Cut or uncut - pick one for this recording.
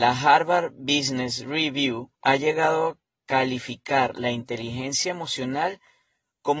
cut